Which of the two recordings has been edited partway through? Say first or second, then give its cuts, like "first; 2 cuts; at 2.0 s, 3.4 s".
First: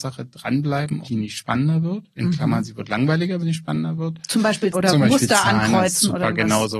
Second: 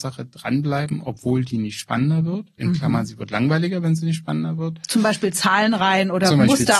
first; 3 cuts; at 1.0 s, 3.4 s, 4.7 s